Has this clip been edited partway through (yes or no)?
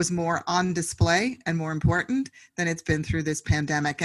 no